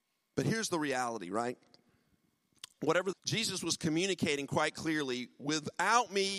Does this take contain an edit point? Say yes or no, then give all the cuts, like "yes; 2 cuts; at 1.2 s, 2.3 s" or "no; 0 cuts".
yes; 1 cut; at 3.1 s